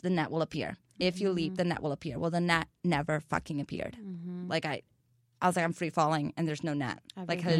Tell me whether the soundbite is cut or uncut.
uncut